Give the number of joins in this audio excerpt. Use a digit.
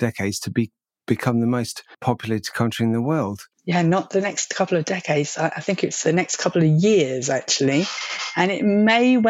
1